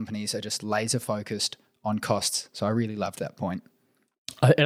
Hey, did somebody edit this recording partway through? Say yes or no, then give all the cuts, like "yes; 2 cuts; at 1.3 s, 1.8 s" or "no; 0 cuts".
no; 0 cuts